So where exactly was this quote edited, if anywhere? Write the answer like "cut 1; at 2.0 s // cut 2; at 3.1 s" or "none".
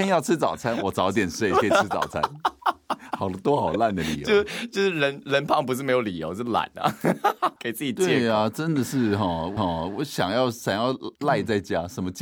cut 1; at 7.6 s // cut 2; at 9.6 s // cut 3; at 11.1 s